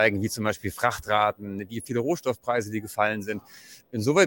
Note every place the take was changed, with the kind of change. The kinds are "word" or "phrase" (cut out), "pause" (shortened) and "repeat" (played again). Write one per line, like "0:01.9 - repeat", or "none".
none